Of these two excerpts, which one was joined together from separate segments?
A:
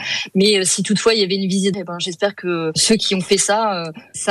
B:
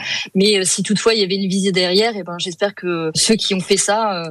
A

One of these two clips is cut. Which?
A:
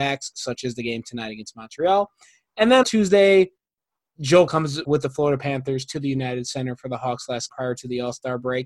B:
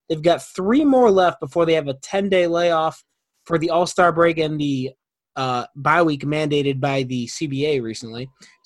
A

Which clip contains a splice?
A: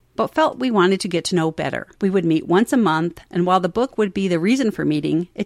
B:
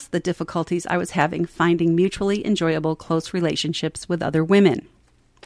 A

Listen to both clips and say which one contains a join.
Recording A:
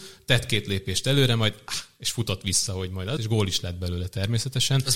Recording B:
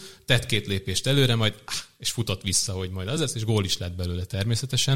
A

